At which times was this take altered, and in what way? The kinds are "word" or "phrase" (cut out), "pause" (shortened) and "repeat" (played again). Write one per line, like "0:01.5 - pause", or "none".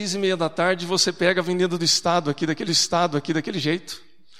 0:02.7 - repeat